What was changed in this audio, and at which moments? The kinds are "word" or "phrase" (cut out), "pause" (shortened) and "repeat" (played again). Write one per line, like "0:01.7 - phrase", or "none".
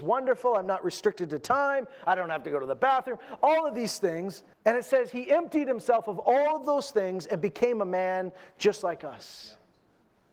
0:04.5 - pause